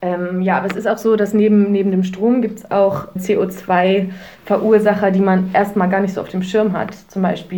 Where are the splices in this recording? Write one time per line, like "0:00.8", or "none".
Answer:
0:03.2
0:04.4